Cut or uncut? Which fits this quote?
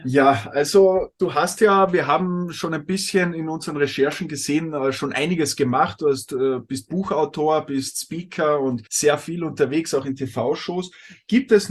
cut